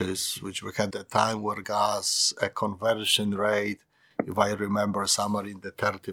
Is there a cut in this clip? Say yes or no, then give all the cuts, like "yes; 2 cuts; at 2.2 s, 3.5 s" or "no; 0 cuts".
yes; 2 cuts; at 0.9 s, 1.6 s